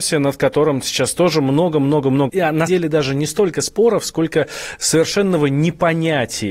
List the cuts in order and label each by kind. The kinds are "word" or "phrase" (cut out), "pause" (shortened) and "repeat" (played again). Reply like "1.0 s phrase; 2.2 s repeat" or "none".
2.3 s word; 2.7 s word